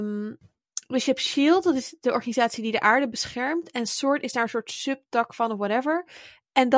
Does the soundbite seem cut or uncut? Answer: uncut